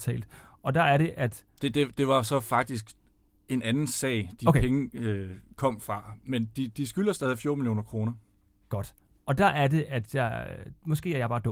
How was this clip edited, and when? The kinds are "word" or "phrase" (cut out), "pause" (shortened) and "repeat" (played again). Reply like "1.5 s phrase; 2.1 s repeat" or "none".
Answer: none